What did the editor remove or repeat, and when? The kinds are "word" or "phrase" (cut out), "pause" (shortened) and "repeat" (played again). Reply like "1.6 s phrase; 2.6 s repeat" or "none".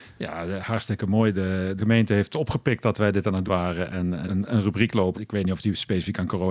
1.8 s word; 3.5 s word; 4.3 s word; 5.1 s word